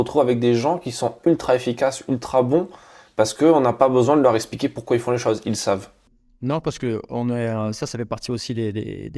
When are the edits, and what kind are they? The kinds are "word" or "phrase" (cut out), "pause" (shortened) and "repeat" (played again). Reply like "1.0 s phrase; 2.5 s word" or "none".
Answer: none